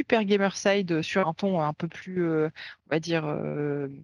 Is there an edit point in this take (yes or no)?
no